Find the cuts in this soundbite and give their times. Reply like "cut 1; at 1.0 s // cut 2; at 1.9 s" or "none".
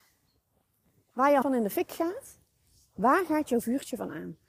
cut 1; at 1.4 s